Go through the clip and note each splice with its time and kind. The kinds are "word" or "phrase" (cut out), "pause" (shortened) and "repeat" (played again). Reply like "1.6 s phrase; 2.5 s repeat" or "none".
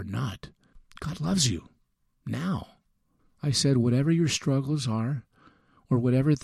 none